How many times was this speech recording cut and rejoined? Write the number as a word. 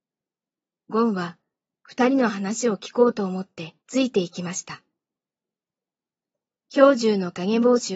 one